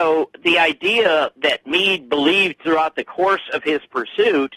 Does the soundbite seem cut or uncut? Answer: uncut